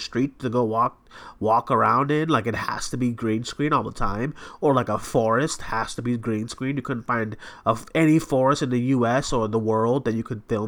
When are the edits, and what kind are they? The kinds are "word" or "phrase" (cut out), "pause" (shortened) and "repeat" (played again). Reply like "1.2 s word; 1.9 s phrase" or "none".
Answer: none